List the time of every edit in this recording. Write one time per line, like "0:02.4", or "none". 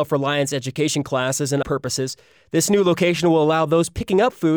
0:01.6

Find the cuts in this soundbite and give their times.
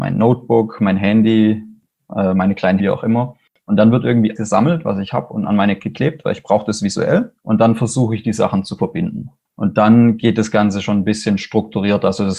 0:02.8
0:04.4
0:05.8
0:07.4

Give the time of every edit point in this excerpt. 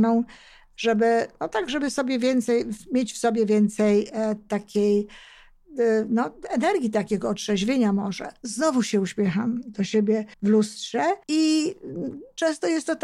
0:10.3
0:11.2

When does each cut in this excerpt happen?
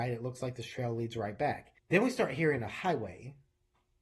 0:01.8

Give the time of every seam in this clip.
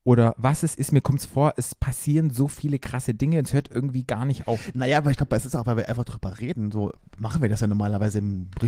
0:07.0

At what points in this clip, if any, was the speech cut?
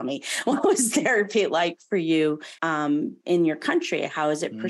0:02.6

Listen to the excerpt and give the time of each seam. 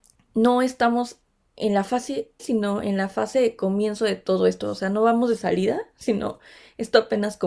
0:02.4

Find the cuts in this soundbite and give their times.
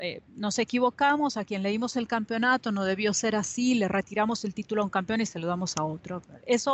none

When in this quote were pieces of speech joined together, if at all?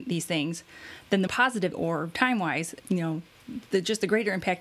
0:01.3
0:01.7
0:02.8

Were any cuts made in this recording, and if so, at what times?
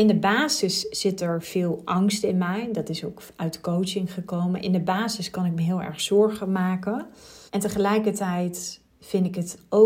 0:07.5

